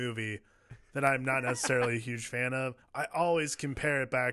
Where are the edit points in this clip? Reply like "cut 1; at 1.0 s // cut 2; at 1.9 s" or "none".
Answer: cut 1; at 2.8 s